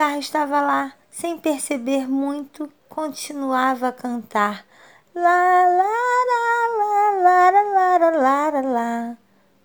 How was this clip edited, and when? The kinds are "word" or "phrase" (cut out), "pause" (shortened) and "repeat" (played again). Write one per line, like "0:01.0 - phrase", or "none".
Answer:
0:01.0 - pause